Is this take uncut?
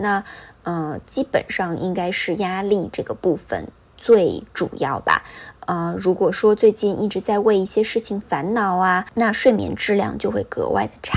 yes; 0 cuts

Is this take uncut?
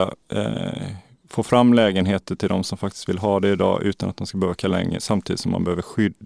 yes; 0 cuts

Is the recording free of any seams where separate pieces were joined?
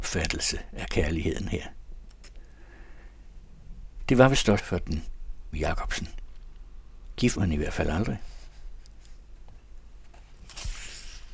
no; 3 cuts; at 4.6 s, 5.5 s, 7.4 s

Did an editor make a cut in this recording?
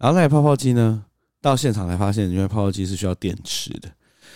no; 0 cuts

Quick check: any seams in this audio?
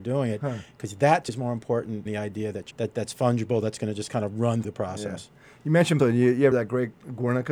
yes; 6 cuts; at 1.3 s, 2.1 s, 2.7 s, 4.6 s, 6.0 s, 6.5 s

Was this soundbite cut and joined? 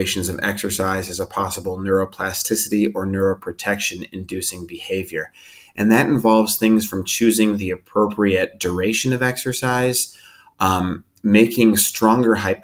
no; 0 cuts

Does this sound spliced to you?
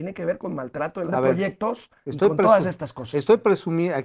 yes; 1 cut; at 1.1 s

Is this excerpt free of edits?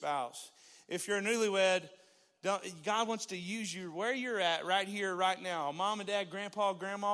yes; 0 cuts

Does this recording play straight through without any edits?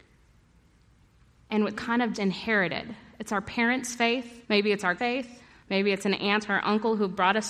no; 5 cuts; at 1.7 s, 2.1 s, 4.4 s, 5.0 s, 5.4 s

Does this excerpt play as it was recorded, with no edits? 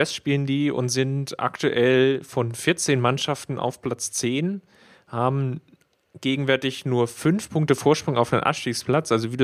yes; 0 cuts

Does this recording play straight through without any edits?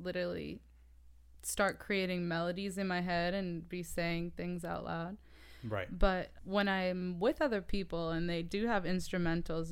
no; 1 cut; at 6.3 s

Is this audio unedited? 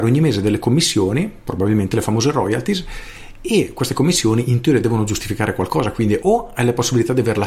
yes; 0 cuts

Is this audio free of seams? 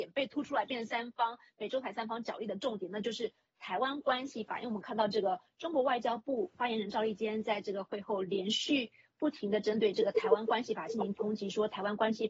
yes; 0 cuts

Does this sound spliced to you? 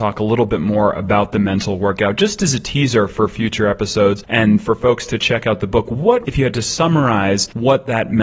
yes; 1 cut; at 6.2 s

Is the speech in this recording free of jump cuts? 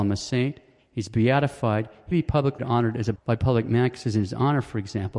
no; 3 cuts; at 2.1 s, 2.6 s, 3.2 s

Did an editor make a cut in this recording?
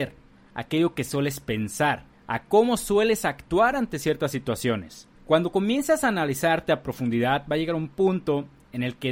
yes; 2 cuts; at 2.1 s, 5.1 s

